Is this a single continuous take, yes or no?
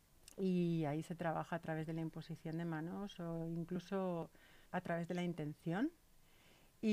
no